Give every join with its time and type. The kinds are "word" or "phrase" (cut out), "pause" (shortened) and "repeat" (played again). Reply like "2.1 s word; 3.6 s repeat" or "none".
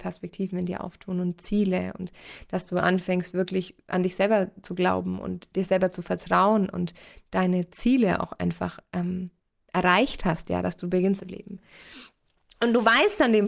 11.2 s phrase